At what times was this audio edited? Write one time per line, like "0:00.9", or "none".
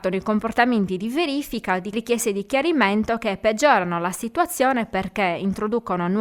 0:01.9